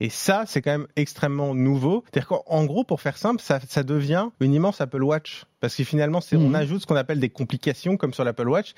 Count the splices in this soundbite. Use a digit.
2